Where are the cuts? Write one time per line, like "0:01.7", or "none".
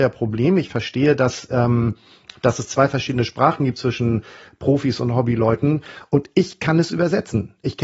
none